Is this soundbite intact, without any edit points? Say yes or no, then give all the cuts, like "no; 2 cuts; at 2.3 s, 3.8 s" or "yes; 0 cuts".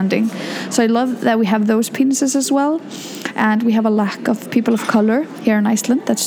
yes; 0 cuts